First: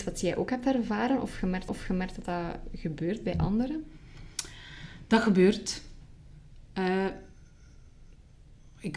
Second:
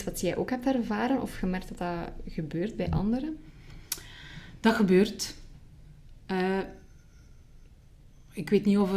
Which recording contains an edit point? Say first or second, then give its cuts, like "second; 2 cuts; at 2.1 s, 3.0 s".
first; 1 cut; at 1.7 s